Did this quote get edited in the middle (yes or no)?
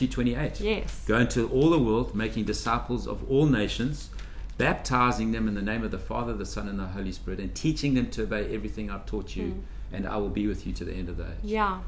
no